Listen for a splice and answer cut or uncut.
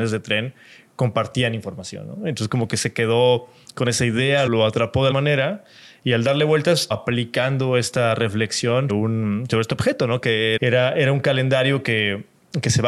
cut